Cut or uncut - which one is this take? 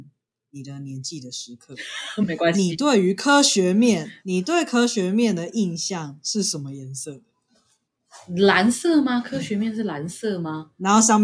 cut